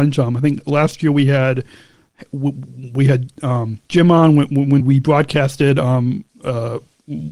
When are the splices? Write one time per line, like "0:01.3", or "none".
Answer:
0:03.8
0:04.8
0:06.3

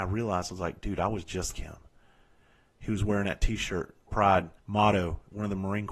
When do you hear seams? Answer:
0:01.5
0:04.1
0:04.6

